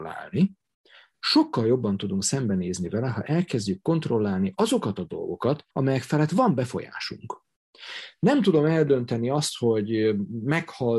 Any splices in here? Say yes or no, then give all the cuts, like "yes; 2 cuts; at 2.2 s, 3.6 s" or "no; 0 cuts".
yes; 1 cut; at 5.7 s